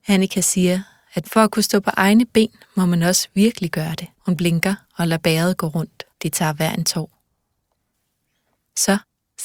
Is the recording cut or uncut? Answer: cut